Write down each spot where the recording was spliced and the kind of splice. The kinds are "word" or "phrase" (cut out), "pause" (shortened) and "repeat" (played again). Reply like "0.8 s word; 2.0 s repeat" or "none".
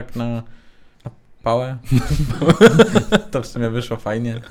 0.9 s pause

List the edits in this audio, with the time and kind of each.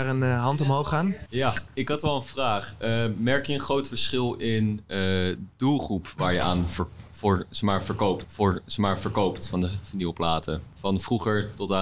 8.2 s repeat

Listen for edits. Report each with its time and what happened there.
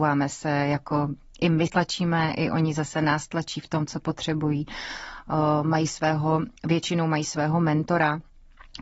1.7 s word; 6.6 s pause

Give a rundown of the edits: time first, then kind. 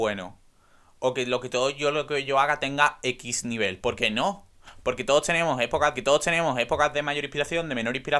5.9 s repeat

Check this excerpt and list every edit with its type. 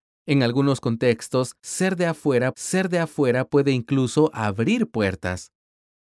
2.5 s repeat

